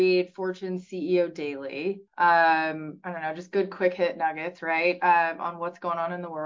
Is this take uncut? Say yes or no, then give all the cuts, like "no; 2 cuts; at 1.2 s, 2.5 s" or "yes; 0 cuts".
no; 1 cut; at 2.1 s